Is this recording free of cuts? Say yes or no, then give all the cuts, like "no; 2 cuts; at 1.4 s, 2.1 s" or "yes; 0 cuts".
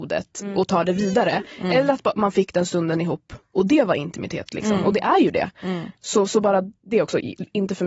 yes; 0 cuts